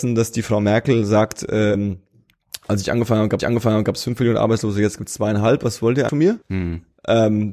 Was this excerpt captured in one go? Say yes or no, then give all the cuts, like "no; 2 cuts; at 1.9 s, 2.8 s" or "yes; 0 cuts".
no; 4 cuts; at 1.7 s, 3.4 s, 6.1 s, 6.4 s